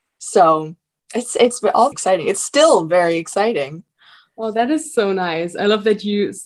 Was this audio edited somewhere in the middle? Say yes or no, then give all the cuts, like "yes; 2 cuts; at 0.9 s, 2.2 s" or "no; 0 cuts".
yes; 1 cut; at 1.9 s